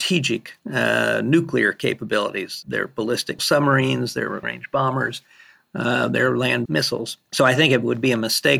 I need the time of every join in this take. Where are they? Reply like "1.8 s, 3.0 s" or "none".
2.6 s, 3.4 s, 4.4 s, 6.7 s